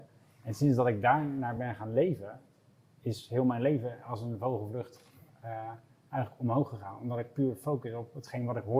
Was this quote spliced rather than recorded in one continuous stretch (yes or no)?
no